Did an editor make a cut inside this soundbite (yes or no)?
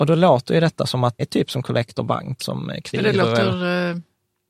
yes